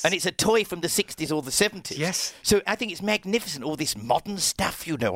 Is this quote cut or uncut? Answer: cut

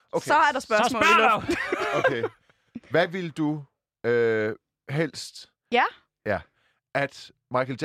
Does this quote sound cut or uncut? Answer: uncut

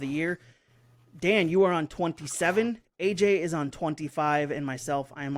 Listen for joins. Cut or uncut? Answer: uncut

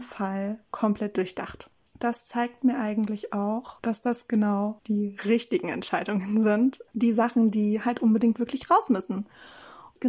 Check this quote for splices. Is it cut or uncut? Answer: uncut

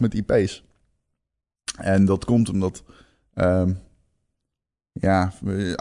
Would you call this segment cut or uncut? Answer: uncut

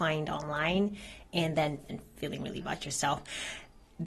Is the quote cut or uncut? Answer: cut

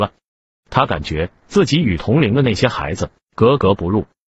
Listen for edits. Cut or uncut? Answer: cut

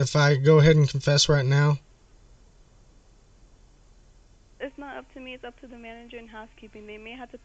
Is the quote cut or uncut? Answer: uncut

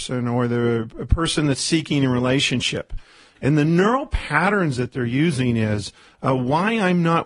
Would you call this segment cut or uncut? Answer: uncut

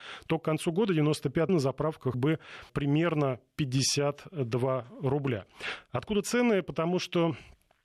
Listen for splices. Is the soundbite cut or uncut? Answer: cut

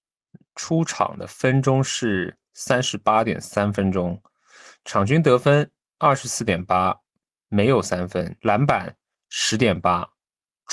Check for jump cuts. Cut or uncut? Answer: uncut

